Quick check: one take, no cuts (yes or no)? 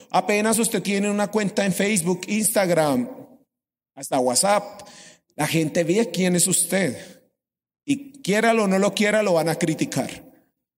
yes